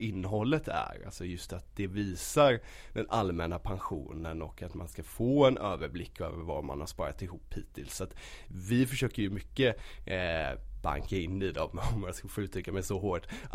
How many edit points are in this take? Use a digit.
0